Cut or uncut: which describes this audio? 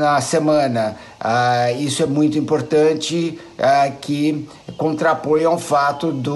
uncut